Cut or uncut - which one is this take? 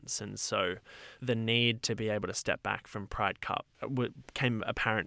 cut